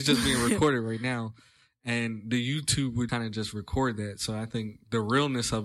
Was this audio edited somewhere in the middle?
yes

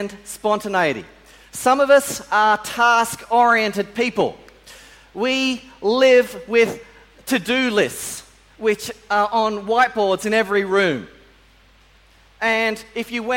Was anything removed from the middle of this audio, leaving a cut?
no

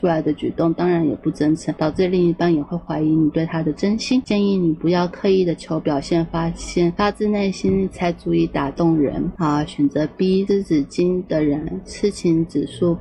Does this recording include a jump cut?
no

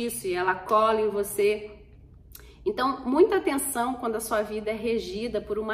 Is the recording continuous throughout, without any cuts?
yes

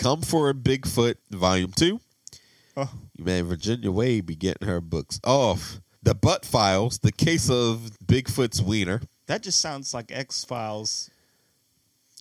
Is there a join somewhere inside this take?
yes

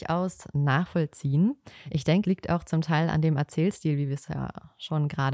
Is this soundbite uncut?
no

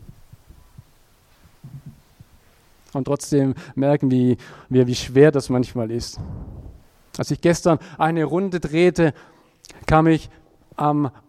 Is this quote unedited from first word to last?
yes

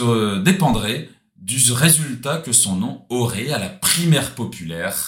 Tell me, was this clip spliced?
no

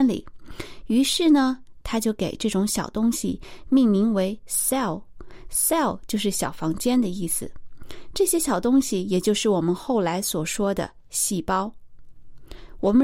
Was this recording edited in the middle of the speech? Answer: no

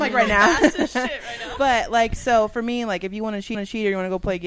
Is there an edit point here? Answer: yes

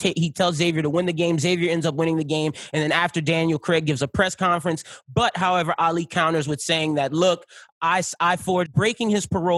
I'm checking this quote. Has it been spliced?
yes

